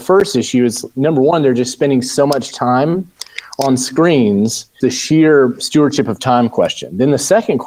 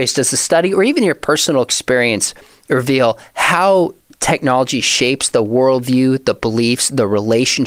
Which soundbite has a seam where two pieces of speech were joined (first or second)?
first